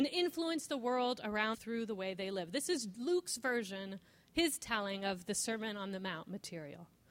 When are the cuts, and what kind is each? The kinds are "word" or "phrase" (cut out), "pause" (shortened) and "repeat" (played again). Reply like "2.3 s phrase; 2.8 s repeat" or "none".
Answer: 1.5 s word